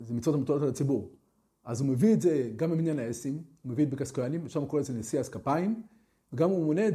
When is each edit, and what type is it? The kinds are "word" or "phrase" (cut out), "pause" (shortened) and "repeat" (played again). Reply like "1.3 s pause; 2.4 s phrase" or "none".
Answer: none